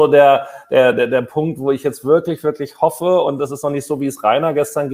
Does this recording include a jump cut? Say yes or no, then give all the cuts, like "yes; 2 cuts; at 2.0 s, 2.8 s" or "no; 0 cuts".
no; 0 cuts